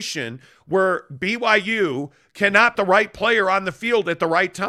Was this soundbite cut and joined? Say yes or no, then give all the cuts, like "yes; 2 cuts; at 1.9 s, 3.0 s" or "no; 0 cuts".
yes; 1 cut; at 2.7 s